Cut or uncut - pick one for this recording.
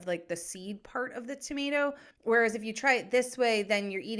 cut